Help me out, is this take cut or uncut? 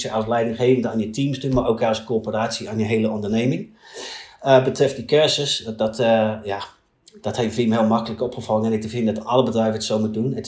uncut